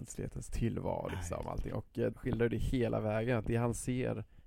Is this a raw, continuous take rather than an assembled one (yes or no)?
no